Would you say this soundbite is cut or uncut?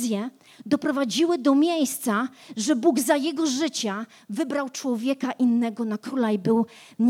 uncut